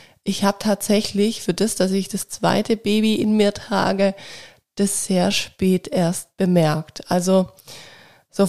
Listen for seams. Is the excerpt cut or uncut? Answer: uncut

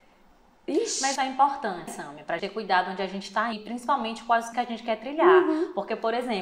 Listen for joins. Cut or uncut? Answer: cut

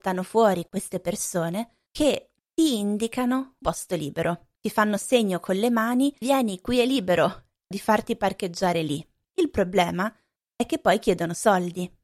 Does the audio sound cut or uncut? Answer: cut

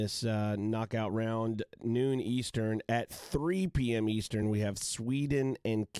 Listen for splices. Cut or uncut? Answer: uncut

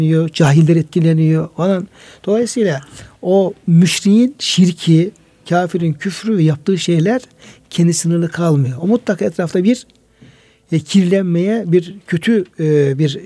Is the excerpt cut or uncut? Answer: uncut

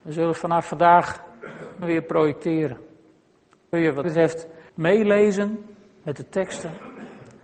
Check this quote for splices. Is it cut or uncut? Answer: cut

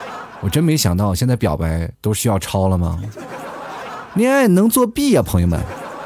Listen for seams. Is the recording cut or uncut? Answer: cut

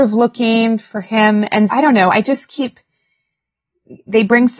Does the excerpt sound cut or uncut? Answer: cut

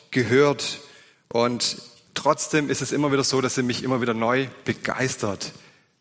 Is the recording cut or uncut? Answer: uncut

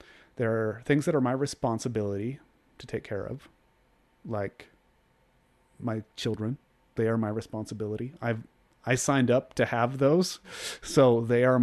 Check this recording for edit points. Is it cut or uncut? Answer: uncut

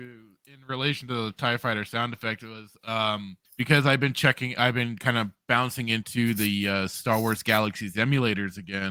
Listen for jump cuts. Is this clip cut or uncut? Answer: cut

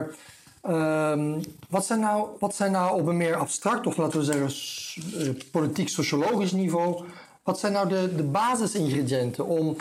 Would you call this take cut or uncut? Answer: uncut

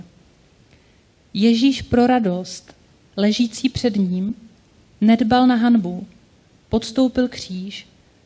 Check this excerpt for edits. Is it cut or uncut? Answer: uncut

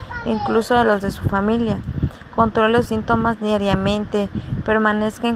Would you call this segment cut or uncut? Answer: cut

